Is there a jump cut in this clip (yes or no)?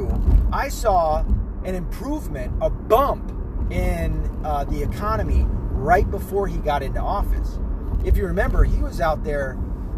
no